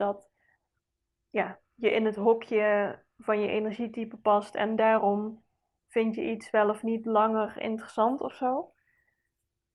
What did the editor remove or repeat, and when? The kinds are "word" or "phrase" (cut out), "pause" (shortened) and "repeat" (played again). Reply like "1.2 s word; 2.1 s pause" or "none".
none